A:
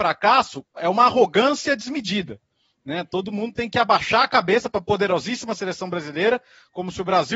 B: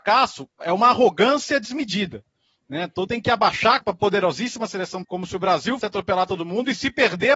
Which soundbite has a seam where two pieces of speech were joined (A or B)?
B